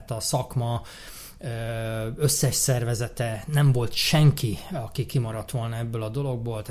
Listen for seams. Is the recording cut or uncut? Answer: uncut